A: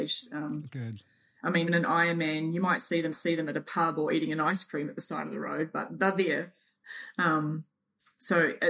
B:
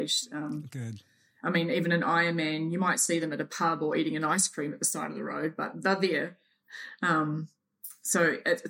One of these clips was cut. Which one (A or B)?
A